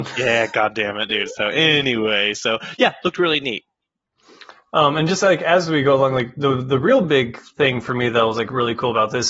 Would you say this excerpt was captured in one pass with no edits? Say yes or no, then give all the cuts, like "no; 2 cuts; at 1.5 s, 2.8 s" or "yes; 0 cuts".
yes; 0 cuts